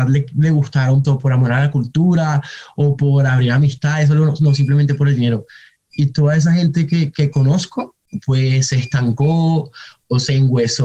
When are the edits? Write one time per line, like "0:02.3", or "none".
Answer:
0:01.0